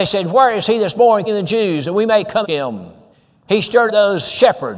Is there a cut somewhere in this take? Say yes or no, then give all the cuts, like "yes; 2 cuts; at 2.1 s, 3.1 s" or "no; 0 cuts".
yes; 4 cuts; at 1.3 s, 2.4 s, 3.1 s, 3.9 s